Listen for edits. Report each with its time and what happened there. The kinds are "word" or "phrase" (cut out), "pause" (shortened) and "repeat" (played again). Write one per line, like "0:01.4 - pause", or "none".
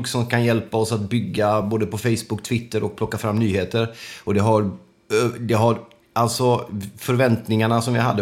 none

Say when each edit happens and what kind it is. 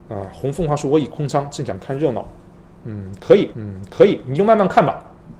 0:03.5 - repeat

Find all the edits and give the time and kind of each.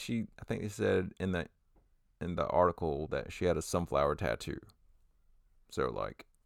none

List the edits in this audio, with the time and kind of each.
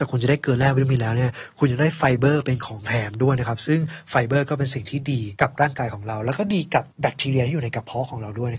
none

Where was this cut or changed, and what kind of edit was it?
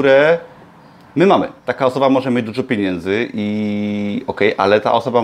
0:01.6 - pause

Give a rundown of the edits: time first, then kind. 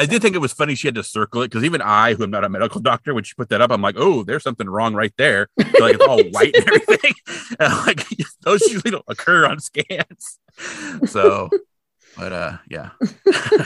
none

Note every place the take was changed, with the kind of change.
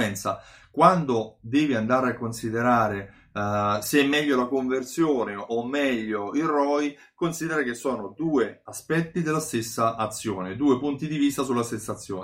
none

